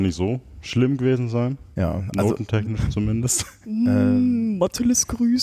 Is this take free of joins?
yes; 0 cuts

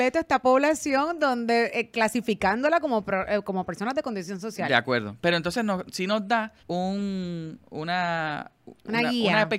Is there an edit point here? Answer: yes; 1 cut; at 6.6 s

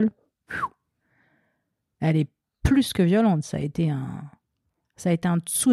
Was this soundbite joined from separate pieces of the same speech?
no; 0 cuts

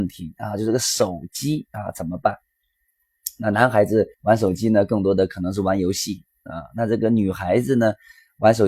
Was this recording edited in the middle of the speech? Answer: yes; 1 cut; at 4.1 s

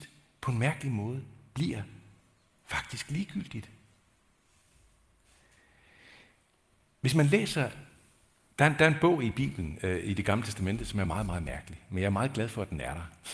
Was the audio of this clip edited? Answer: no; 0 cuts

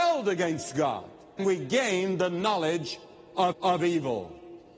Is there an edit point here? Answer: yes; 2 cuts; at 1.4 s, 3.5 s

